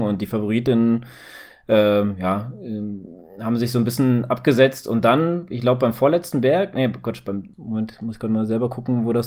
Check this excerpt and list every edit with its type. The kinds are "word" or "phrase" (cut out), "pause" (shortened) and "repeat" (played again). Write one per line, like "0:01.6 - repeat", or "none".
0:07.5 - word